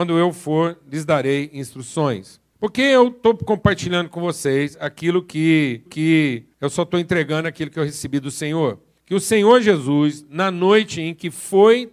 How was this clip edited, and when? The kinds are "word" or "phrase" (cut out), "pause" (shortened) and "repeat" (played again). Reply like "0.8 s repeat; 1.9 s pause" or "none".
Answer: 5.9 s repeat